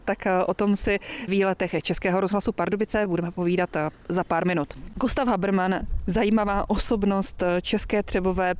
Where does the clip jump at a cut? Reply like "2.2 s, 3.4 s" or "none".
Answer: 1.3 s